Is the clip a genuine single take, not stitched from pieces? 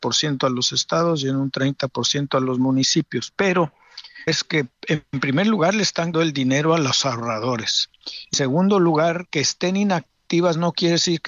no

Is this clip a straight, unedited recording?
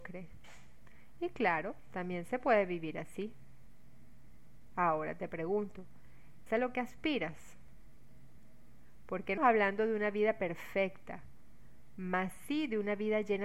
no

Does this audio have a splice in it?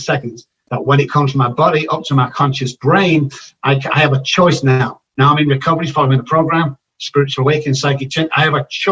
no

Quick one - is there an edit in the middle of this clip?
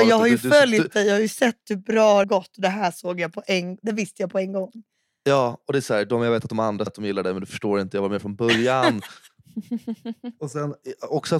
yes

